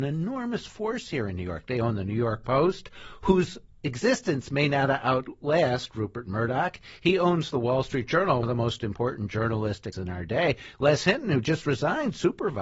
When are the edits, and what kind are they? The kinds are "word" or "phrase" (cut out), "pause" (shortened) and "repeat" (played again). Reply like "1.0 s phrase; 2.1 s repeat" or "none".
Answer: 8.4 s word; 9.9 s word